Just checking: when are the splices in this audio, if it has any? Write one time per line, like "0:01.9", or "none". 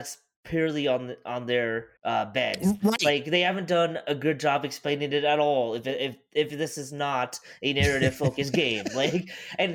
0:02.0